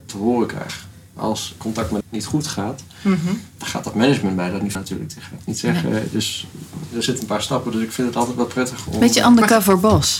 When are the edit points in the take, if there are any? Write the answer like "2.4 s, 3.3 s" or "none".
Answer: 2.0 s, 4.7 s